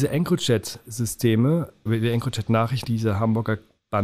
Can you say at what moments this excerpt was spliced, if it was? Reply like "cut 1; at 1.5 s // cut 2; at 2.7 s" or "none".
cut 1; at 1.9 s // cut 2; at 2.8 s